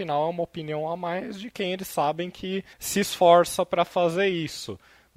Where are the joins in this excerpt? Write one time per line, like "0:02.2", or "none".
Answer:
0:02.7